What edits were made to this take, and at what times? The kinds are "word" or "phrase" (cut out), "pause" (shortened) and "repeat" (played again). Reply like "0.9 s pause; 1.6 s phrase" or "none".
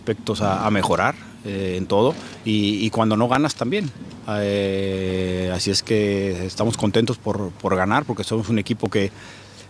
none